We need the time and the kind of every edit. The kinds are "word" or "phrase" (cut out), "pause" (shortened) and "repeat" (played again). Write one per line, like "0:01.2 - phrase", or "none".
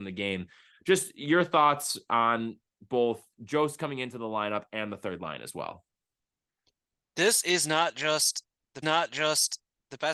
0:08.8 - repeat